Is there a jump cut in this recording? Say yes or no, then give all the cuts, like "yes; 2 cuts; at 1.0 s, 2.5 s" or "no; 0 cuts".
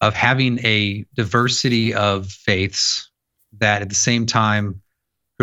no; 0 cuts